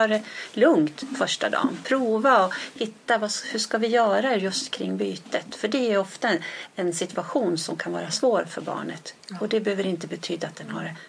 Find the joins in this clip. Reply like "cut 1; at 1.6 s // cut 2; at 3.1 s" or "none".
none